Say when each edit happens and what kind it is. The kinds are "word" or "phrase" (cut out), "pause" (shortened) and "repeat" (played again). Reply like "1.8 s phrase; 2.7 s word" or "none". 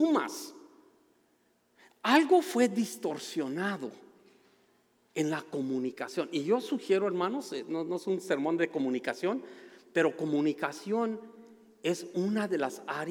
none